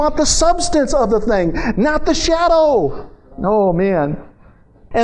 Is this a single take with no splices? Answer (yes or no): yes